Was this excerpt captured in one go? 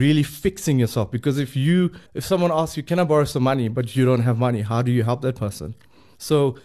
no; 1 cut; at 2.1 s

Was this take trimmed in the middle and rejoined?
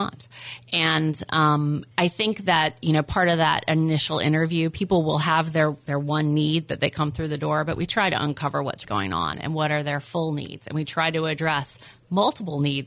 yes; 2 cuts; at 1.9 s, 8.8 s

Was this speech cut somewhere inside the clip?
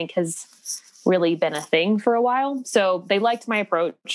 no; 0 cuts

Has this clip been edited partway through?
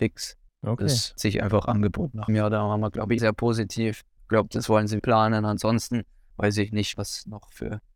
yes; 5 cuts; at 1.2 s, 2.3 s, 3.2 s, 5.0 s, 6.9 s

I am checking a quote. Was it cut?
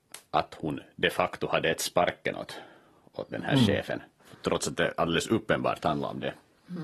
no; 0 cuts

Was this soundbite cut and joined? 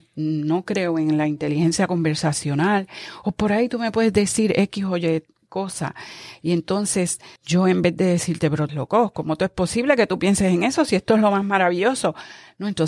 yes; 2 cuts; at 7.4 s, 8.7 s

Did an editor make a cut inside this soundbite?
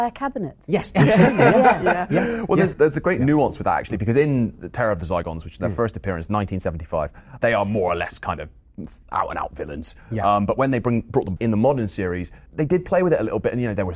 yes; 4 cuts; at 2.7 s, 7.4 s, 11.4 s, 12.5 s

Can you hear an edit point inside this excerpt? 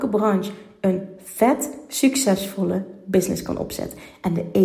no; 0 cuts

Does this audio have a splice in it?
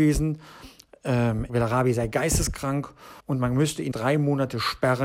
yes; 3 cuts; at 1.5 s, 3.2 s, 3.9 s

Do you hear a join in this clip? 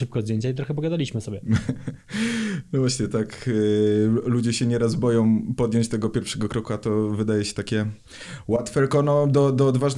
no; 0 cuts

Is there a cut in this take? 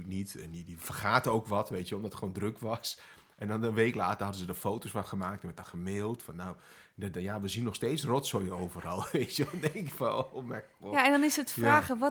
no; 0 cuts

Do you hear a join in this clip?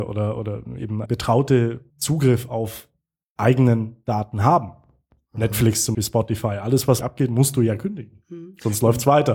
yes; 5 cuts; at 1.1 s, 1.9 s, 3.3 s, 5.9 s, 7.0 s

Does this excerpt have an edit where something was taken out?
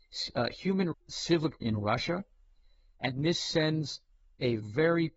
yes; 2 cuts; at 0.9 s, 1.6 s

